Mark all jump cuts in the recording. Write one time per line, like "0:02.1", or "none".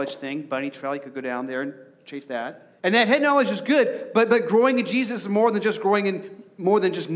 0:02.8